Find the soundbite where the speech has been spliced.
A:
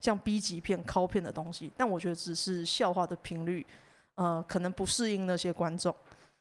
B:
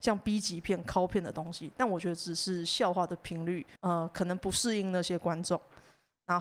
B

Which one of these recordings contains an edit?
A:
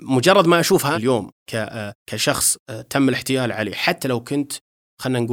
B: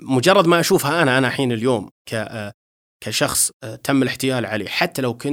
A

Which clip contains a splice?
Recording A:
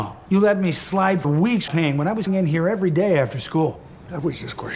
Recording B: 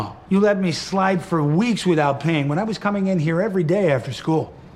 A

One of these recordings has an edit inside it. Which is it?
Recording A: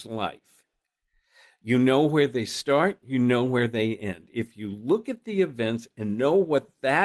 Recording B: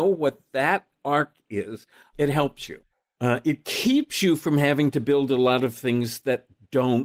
B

